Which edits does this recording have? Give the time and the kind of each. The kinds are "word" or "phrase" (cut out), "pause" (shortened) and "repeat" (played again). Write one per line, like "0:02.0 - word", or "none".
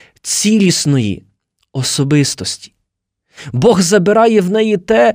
none